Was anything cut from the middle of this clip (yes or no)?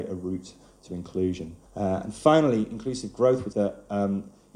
yes